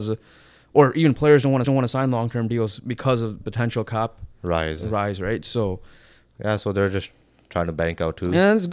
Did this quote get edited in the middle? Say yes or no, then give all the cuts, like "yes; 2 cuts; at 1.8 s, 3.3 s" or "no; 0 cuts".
yes; 1 cut; at 1.6 s